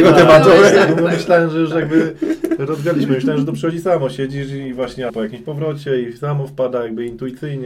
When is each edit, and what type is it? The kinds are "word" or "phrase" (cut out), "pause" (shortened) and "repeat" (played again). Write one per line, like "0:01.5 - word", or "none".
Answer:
0:05.1 - word